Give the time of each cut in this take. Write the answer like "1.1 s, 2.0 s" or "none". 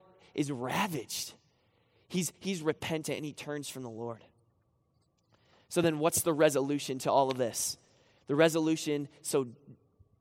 none